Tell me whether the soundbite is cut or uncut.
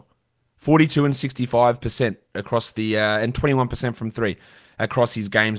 uncut